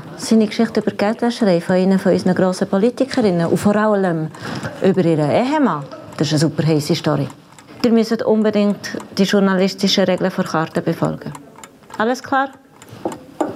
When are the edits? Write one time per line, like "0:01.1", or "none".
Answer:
none